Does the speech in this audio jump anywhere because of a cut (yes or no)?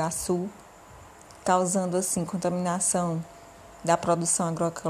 no